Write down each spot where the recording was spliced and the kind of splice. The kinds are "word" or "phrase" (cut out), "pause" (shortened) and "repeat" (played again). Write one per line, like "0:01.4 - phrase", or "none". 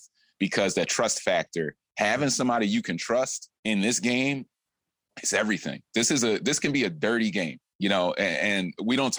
0:03.6 - pause